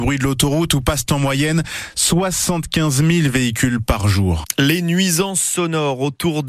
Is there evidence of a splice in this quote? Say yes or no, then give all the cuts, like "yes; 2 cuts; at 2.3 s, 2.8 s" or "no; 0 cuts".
no; 0 cuts